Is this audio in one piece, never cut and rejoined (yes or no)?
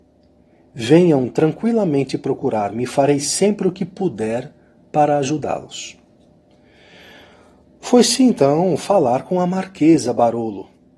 yes